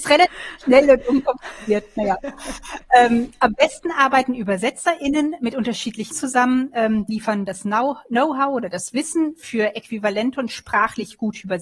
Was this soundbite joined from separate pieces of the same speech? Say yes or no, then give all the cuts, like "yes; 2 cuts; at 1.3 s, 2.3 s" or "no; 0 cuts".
yes; 2 cuts; at 6.1 s, 7.1 s